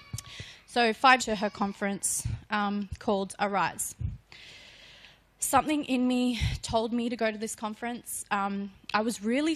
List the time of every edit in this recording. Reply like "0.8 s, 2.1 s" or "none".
1.2 s